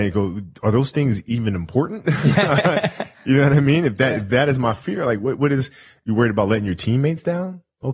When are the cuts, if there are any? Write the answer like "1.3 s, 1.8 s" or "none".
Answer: none